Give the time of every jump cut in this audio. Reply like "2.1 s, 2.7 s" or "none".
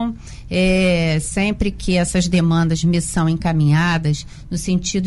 none